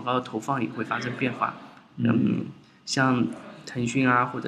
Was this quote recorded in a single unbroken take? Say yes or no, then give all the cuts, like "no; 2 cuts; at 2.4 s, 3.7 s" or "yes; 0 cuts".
yes; 0 cuts